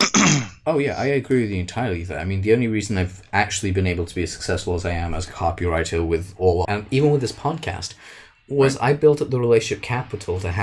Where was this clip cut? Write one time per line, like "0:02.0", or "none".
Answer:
0:06.6